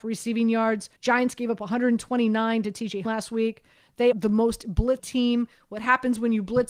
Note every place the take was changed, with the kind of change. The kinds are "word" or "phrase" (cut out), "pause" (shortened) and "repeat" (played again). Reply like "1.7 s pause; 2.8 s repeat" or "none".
1.0 s pause; 3.0 s word; 4.1 s word; 5.0 s word